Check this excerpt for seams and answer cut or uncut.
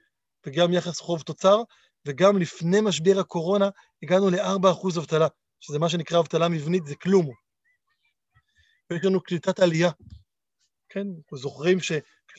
uncut